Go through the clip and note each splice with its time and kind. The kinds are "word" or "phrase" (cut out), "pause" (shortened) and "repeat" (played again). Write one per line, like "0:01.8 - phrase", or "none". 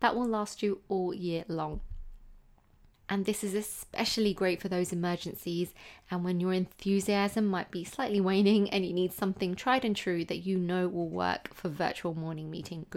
none